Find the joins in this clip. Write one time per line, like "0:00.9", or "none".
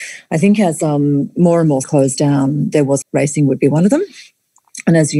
0:01.8
0:03.0